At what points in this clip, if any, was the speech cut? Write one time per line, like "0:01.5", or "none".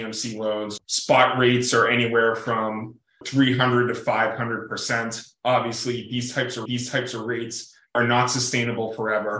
0:06.7